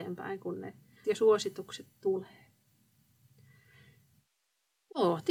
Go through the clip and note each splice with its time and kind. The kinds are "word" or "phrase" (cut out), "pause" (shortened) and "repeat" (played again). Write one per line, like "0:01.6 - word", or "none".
0:01.0 - word